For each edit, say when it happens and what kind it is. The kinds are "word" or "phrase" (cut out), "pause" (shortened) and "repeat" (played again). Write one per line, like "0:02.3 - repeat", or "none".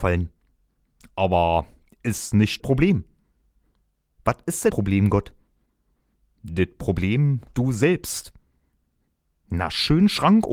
0:02.6 - word
0:04.7 - word
0:07.5 - word

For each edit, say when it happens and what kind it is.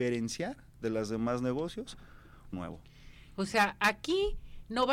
0:02.5 - word

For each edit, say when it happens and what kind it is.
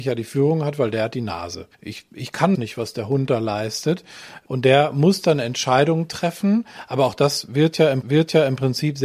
0:01.7 - pause
0:02.5 - word
0:08.0 - repeat

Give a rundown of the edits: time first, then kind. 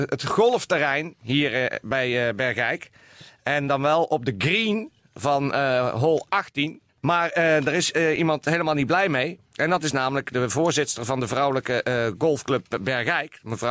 0:06.9 - pause
0:09.4 - pause

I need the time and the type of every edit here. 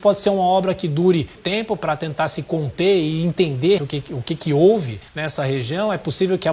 0:01.3 - word
0:03.8 - word
0:05.1 - pause

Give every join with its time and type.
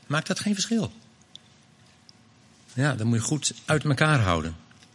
none

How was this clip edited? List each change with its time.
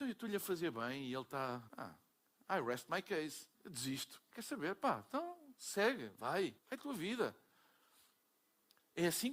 0:01.7 - pause
0:03.5 - pause
0:06.6 - pause

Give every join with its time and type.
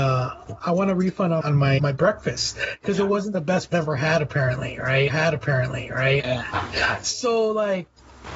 0:01.4 - word
0:01.8 - word
0:03.7 - phrase
0:05.1 - repeat

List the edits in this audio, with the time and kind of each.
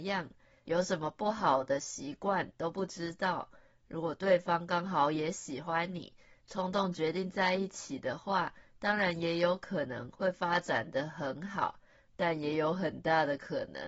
none

